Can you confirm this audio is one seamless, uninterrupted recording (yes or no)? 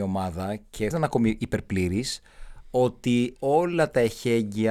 no